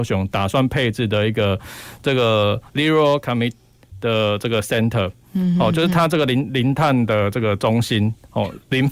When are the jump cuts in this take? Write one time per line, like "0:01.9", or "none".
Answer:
0:02.7